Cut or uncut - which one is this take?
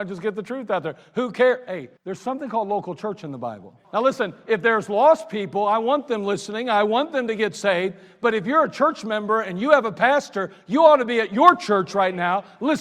cut